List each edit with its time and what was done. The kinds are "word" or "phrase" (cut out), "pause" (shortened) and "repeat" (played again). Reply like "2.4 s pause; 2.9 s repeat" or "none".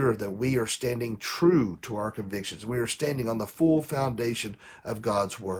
none